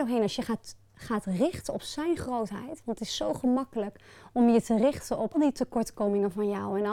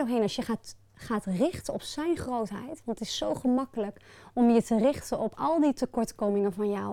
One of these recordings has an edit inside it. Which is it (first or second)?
first